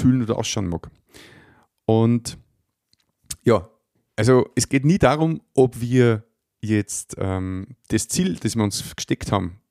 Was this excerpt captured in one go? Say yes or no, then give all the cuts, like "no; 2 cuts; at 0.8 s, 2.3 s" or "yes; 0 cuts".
yes; 0 cuts